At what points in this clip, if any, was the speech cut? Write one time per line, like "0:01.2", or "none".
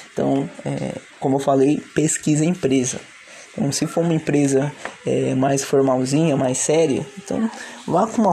0:01.1